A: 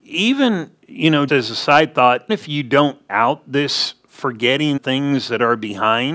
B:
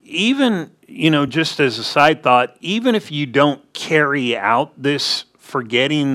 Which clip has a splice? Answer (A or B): A